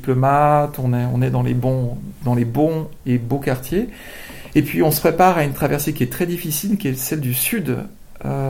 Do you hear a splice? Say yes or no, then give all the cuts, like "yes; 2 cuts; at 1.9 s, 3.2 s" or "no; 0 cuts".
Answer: no; 0 cuts